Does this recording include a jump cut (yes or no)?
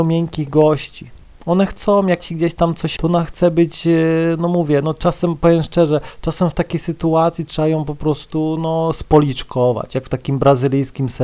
yes